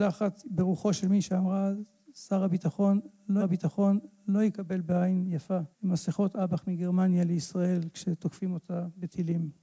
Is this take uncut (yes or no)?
no